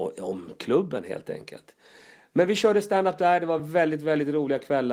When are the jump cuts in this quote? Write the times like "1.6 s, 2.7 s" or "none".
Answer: none